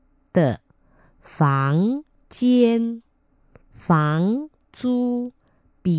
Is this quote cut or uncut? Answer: uncut